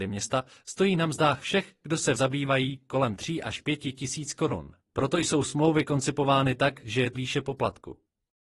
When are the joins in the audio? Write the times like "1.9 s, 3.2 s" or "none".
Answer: 2.2 s, 4.8 s, 7.1 s

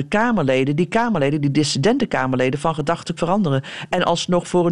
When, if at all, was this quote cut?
3.2 s

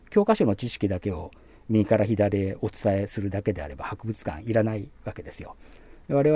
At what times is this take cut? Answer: none

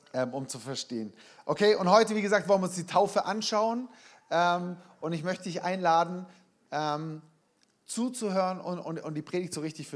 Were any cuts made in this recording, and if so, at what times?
none

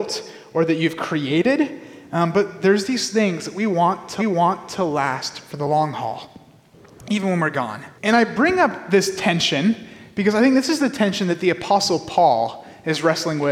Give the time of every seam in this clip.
4.2 s, 8.0 s

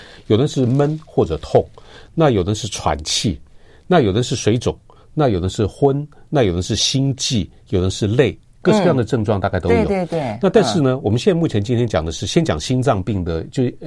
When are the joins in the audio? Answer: none

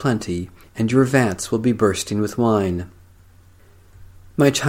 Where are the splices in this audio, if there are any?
none

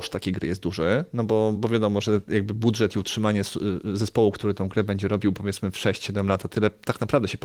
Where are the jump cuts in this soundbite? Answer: 1.6 s

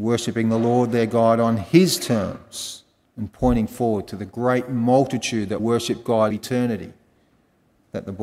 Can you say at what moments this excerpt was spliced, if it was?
3.1 s, 5.6 s, 6.3 s

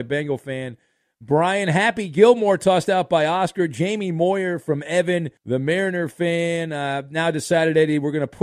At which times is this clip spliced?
5.4 s

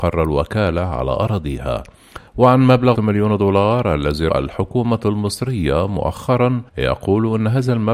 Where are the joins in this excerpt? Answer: 2.3 s, 2.9 s, 4.3 s, 6.7 s

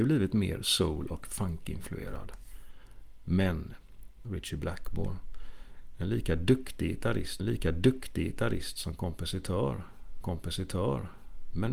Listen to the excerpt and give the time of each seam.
4.2 s, 7.4 s, 10.2 s

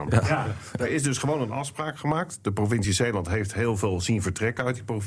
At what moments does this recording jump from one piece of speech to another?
none

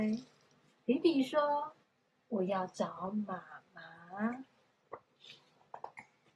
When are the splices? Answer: 1.8 s

